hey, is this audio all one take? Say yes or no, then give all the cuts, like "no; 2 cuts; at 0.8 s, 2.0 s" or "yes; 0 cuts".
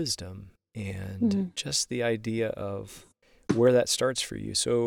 yes; 0 cuts